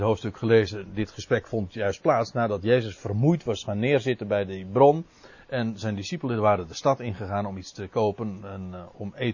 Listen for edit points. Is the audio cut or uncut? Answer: uncut